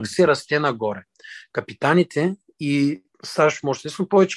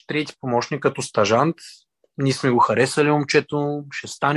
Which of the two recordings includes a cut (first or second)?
first